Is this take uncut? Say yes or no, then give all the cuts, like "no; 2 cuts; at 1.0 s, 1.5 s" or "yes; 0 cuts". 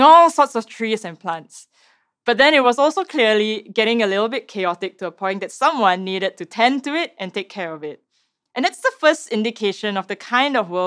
yes; 0 cuts